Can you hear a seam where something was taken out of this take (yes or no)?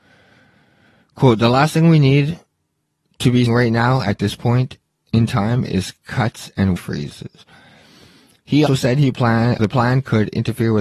yes